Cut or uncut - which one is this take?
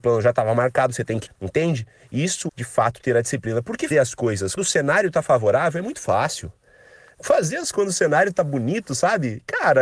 cut